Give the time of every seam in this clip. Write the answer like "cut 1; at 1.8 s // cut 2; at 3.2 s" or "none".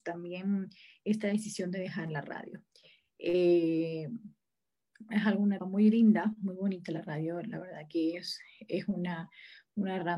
cut 1; at 5.6 s